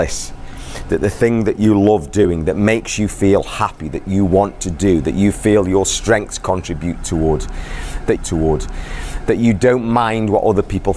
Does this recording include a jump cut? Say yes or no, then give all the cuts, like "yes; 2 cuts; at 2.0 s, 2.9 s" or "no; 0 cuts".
yes; 1 cut; at 8.2 s